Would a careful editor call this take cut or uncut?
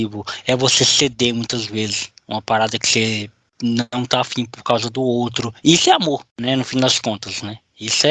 cut